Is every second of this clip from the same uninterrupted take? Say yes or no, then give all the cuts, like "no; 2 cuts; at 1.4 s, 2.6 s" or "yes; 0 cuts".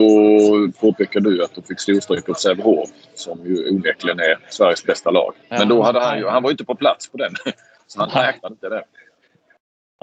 yes; 0 cuts